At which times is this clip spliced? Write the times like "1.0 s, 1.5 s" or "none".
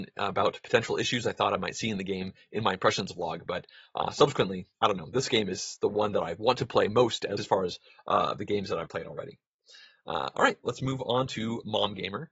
7.4 s, 8.9 s